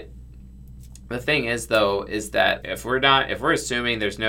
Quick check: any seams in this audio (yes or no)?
yes